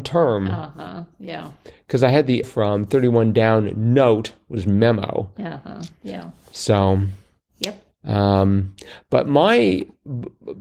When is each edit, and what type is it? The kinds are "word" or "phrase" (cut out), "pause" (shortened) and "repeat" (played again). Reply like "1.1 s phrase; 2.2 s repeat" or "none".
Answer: 2.4 s word